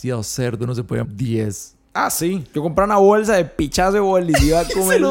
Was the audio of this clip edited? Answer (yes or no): yes